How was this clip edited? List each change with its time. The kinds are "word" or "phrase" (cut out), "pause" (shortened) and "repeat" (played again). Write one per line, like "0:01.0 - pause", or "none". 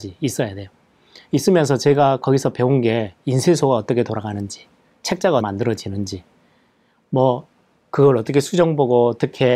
0:05.4 - word